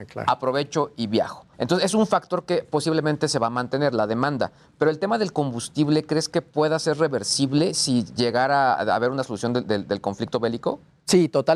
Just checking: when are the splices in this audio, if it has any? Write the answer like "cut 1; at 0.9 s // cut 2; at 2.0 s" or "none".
cut 1; at 1.5 s // cut 2; at 8.7 s